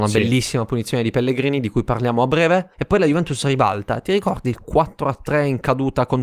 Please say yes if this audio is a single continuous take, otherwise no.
no